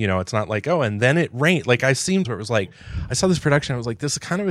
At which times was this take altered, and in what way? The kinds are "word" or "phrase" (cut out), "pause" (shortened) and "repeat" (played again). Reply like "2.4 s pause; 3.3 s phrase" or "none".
2.2 s word